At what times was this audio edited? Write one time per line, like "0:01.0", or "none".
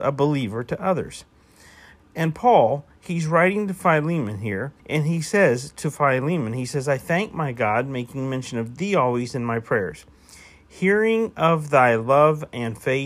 0:04.8